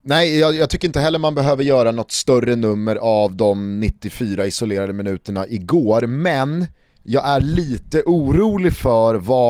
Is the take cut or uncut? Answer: uncut